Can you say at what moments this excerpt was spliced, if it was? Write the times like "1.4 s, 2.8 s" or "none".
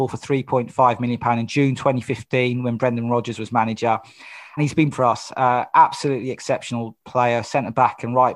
4.6 s, 4.9 s